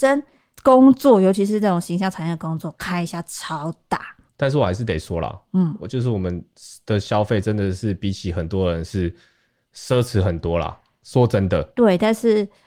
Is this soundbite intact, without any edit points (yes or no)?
yes